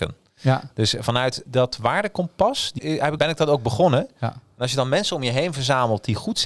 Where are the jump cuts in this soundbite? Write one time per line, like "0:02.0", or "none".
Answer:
0:01.5
0:02.8
0:03.2